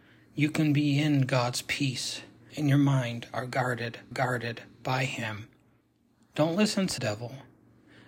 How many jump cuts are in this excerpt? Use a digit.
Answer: 4